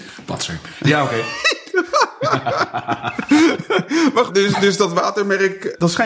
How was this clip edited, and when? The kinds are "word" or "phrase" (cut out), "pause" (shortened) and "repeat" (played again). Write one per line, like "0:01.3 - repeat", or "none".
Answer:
0:04.3 - word